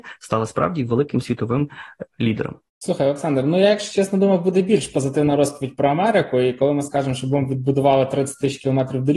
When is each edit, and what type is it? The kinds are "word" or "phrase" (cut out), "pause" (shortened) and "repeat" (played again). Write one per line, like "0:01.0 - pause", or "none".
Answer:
0:02.1 - word